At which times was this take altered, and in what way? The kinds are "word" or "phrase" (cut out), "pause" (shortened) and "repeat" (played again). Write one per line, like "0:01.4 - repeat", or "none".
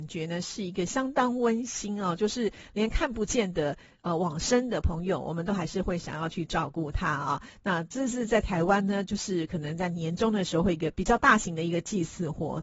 none